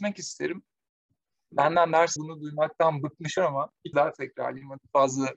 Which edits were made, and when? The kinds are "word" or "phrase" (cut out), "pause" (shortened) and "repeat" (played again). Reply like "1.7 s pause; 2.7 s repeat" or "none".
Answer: 2.2 s word; 3.4 s word; 3.9 s word